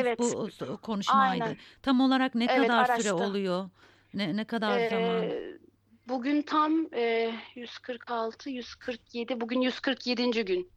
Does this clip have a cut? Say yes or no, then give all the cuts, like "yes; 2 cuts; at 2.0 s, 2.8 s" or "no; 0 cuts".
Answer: no; 0 cuts